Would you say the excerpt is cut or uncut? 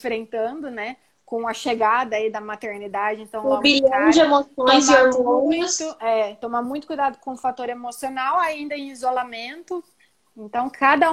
uncut